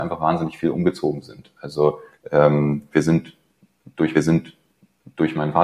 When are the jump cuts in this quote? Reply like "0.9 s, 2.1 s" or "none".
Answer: 2.1 s, 4.1 s

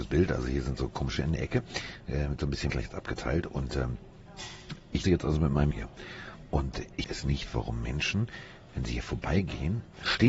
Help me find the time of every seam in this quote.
1.2 s, 2.7 s, 5.0 s, 5.7 s, 7.0 s

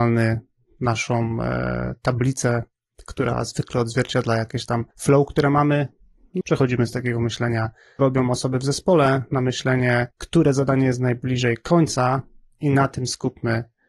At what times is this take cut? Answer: 4.9 s, 6.4 s, 8.0 s, 10.1 s

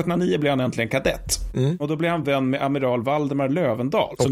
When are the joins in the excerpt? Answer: none

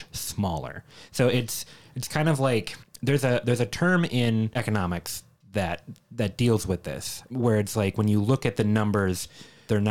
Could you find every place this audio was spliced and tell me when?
none

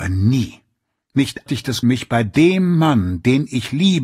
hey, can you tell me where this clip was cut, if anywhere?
1.5 s, 1.8 s

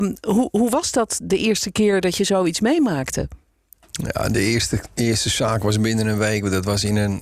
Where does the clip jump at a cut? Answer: none

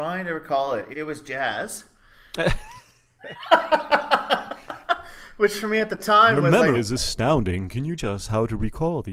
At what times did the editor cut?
0.9 s, 6.7 s, 8.0 s

